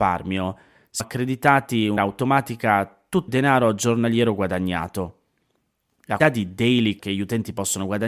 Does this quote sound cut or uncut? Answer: cut